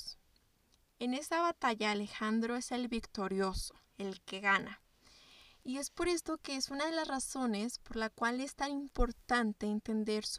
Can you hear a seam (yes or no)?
no